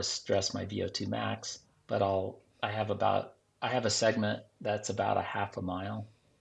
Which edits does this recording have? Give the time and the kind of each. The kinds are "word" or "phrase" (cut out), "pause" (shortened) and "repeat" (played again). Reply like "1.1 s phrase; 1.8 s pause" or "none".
1.7 s pause